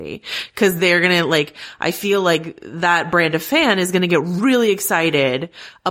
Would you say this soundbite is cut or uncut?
uncut